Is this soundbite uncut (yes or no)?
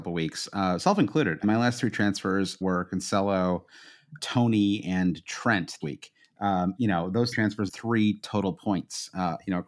no